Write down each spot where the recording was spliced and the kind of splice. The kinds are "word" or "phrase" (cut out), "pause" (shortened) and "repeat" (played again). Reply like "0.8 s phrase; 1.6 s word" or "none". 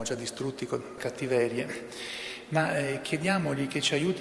1.0 s phrase